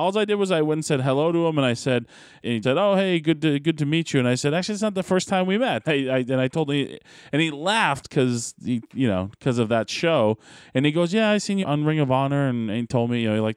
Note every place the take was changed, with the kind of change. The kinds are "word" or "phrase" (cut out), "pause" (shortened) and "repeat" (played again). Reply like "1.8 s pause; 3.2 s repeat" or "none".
2.6 s word; 5.8 s word; 11.6 s word